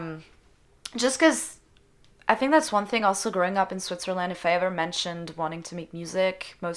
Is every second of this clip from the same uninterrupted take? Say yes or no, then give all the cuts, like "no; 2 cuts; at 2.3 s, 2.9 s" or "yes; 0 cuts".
yes; 0 cuts